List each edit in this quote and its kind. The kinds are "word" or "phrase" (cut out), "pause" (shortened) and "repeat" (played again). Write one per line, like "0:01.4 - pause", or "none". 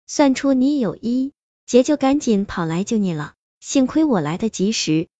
none